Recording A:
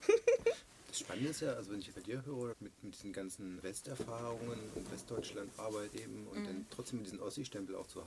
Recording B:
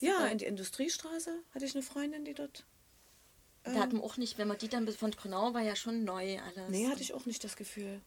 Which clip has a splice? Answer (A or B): A